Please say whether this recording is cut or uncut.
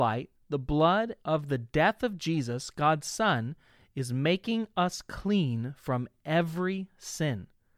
cut